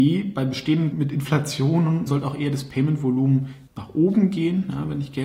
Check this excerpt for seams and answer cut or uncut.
cut